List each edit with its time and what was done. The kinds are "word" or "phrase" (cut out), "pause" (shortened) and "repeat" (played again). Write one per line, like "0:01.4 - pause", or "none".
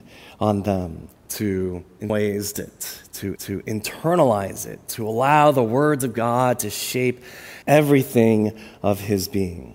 0:02.1 - word
0:02.5 - word
0:03.4 - repeat
0:07.6 - pause